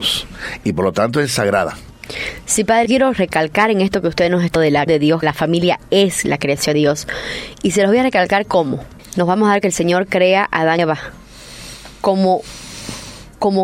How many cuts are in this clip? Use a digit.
7